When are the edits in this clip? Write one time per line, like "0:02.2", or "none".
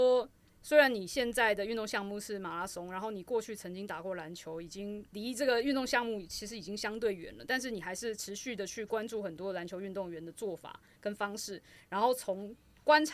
none